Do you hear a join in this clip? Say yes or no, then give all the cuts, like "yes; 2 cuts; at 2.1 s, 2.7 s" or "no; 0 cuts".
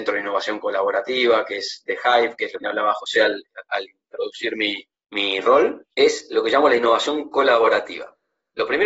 yes; 4 cuts; at 2.6 s, 3.9 s, 4.9 s, 5.9 s